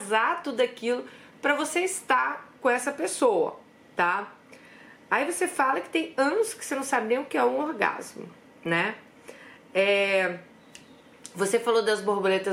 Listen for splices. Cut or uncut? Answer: cut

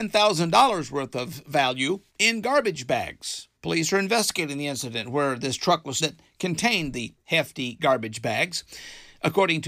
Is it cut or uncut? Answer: cut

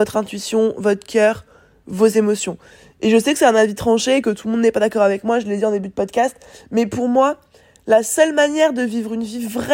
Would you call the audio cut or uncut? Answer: uncut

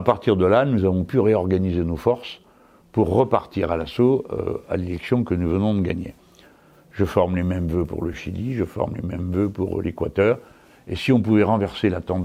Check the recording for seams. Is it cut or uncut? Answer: uncut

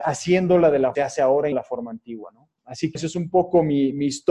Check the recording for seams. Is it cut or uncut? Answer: cut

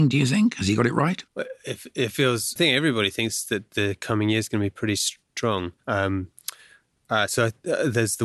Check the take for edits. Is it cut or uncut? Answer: cut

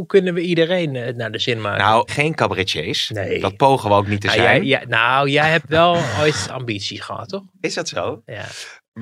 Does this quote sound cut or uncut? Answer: cut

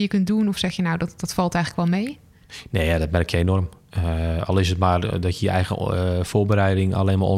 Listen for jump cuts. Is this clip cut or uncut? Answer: uncut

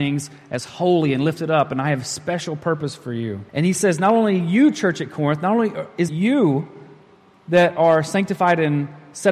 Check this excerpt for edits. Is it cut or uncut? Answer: cut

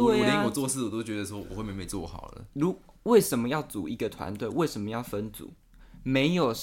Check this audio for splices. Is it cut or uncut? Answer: cut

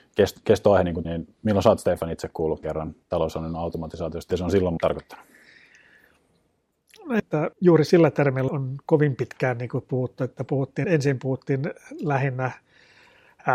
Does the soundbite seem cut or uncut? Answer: cut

